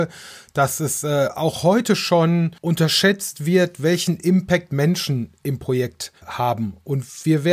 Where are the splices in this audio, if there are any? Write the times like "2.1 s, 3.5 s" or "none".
2.6 s, 6.2 s